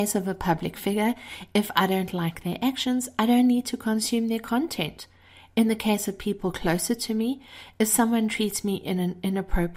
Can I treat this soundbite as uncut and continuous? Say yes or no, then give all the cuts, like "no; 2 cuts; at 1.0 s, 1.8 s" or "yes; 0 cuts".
yes; 0 cuts